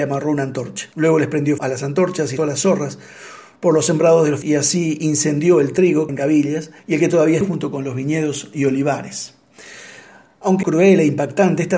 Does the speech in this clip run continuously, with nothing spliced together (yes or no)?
no